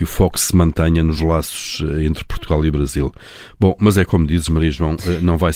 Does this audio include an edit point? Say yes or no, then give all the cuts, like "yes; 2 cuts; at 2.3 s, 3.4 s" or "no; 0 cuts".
no; 0 cuts